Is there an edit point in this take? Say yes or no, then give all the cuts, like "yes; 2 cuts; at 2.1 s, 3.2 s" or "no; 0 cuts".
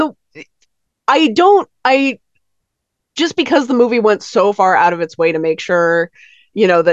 no; 0 cuts